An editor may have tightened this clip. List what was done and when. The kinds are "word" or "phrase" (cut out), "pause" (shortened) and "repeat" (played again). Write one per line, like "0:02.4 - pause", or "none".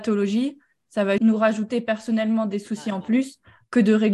0:01.2 - word